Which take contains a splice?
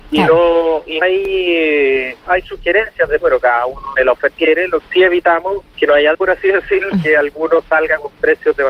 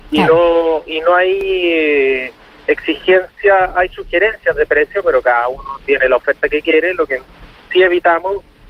first; 9 cuts; at 1.0 s, 2.3 s, 3.2 s, 4.0 s, 4.4 s, 4.8 s, 5.7 s, 6.1 s, 6.9 s

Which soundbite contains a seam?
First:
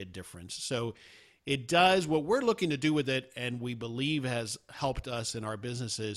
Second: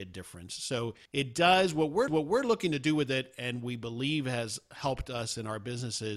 second; 2 cuts; at 1.1 s, 2.1 s

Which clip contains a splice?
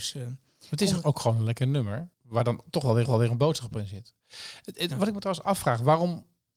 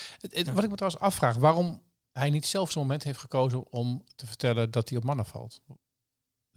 first; 2 cuts; at 2.1 s, 3.0 s

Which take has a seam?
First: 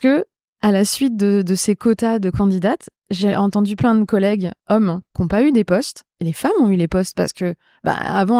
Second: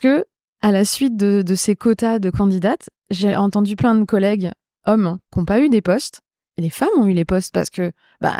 first; 2 cuts; at 4.6 s, 6.1 s

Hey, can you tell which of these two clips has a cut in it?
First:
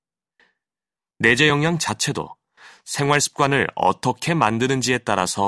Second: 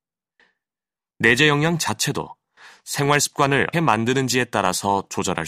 second; 1 cut; at 3.7 s

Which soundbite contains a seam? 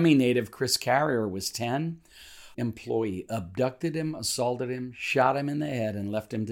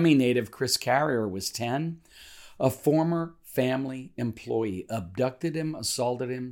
first; 1 cut; at 2.5 s

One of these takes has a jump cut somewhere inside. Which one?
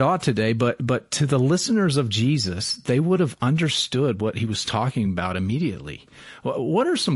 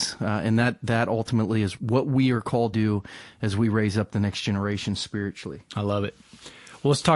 second; 2 cuts; at 1.8 s, 2.7 s

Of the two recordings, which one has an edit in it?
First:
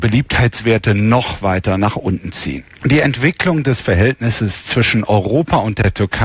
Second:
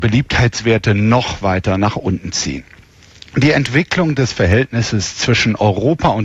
first; 1 cut; at 2.7 s

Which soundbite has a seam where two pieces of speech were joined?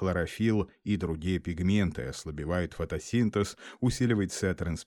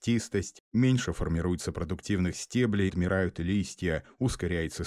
second; 1 cut; at 2.9 s

